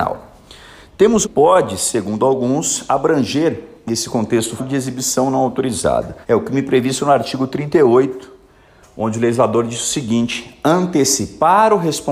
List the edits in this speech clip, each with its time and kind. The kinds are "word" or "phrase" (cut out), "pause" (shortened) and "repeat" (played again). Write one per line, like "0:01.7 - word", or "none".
0:01.2 - phrase
0:04.6 - word
0:06.2 - pause